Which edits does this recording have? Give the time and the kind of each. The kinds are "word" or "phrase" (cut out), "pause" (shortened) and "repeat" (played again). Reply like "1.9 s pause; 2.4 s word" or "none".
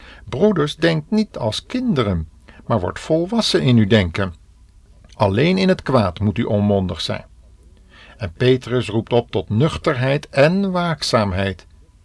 none